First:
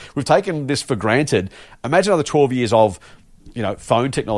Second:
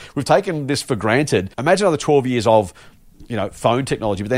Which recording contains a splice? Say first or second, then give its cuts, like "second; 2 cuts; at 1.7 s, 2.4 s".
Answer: second; 1 cut; at 1.5 s